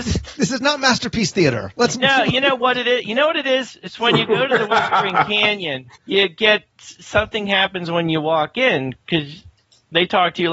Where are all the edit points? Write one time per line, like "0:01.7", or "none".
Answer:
0:06.0
0:09.0